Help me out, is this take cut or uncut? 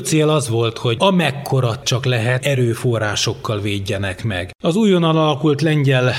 cut